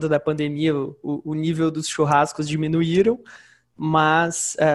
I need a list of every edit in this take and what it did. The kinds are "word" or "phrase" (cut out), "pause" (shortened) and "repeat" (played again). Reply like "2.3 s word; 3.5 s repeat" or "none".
none

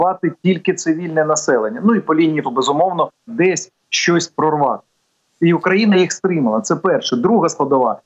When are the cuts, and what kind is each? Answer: 2.4 s word; 3.3 s phrase; 4.9 s pause

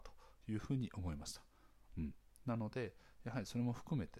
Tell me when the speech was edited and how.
none

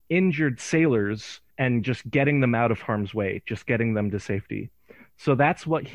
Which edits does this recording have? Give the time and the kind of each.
1.5 s pause

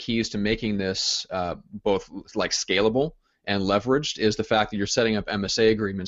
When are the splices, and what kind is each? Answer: none

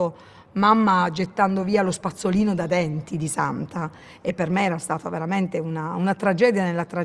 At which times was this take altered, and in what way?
none

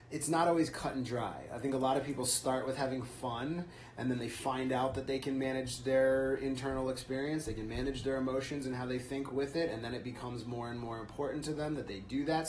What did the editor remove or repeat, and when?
none

